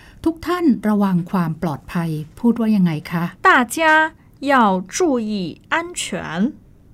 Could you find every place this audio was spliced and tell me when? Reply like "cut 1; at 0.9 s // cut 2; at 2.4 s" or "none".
cut 1; at 3.4 s